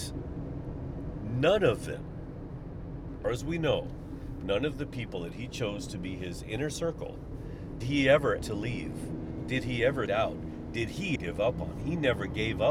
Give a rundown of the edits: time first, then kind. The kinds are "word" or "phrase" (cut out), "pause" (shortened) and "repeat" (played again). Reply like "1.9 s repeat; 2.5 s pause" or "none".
3.2 s word; 7.8 s word; 8.4 s word; 10.1 s word; 11.2 s word